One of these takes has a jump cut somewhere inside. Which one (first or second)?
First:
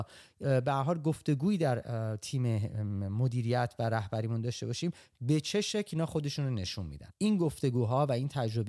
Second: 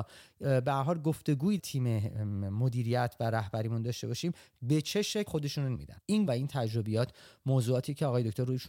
second